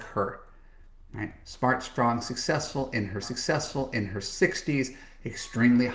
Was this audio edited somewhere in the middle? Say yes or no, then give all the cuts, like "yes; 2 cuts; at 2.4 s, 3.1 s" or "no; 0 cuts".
yes; 1 cut; at 3.2 s